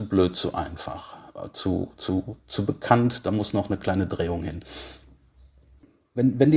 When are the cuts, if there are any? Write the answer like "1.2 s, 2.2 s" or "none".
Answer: none